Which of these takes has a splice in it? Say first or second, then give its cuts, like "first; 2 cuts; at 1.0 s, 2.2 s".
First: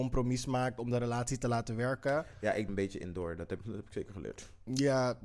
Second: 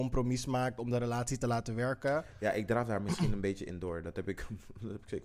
first; 2 cuts; at 2.7 s, 3.6 s